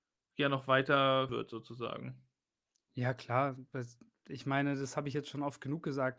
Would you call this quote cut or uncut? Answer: cut